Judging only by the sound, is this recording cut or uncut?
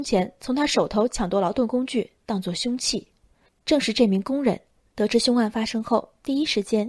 uncut